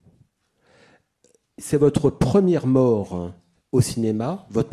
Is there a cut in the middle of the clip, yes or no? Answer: yes